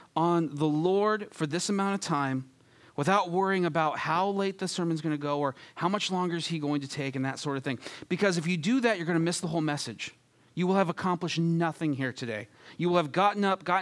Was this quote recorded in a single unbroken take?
yes; 0 cuts

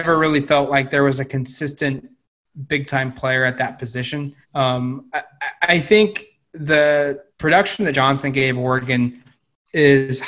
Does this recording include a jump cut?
yes; 3 cuts; at 4.4 s, 7.3 s, 7.9 s

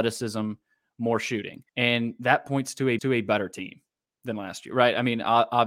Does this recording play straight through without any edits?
no; 2 cuts; at 1.7 s, 3.0 s

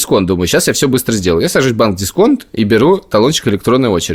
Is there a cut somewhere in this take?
no; 0 cuts

